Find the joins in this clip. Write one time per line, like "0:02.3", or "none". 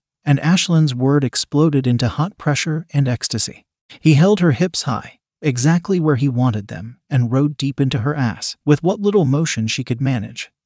0:08.6